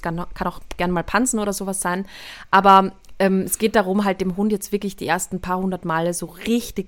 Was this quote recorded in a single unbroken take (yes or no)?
yes